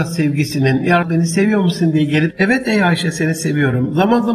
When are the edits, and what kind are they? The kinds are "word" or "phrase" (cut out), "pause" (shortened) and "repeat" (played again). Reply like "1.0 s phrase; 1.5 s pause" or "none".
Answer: 1.0 s word; 2.3 s phrase

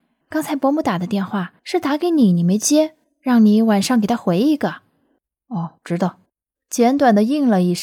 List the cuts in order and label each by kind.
1.6 s pause; 3.0 s pause; 5.8 s pause; 6.3 s pause

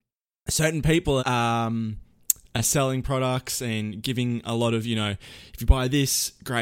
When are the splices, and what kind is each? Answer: 1.2 s word

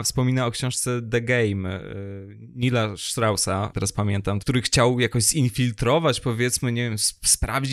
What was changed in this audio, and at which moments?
3.7 s phrase; 4.4 s phrase

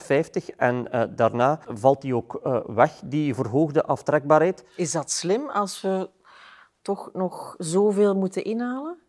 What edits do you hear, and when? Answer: 1.6 s word

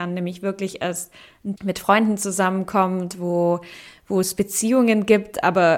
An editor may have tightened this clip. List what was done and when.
1.6 s phrase

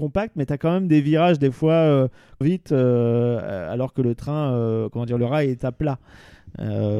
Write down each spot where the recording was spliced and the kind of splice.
2.4 s phrase

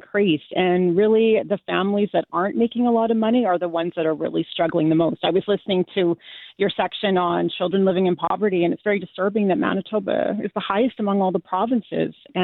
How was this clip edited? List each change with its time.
none

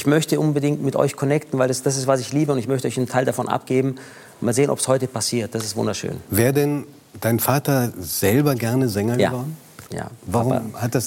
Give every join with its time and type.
9.9 s pause

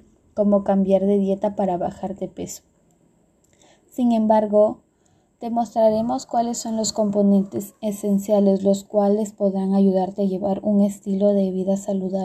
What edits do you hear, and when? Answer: none

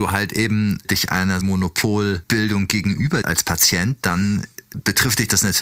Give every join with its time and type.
1.4 s phrase; 3.2 s word

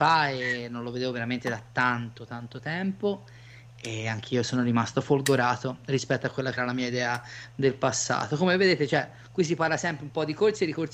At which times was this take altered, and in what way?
6.6 s phrase

